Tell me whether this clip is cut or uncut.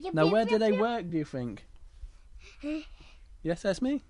uncut